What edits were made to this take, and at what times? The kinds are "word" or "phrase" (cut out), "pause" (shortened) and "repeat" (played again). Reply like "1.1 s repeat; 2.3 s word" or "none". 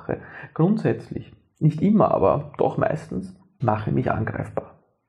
3.6 s word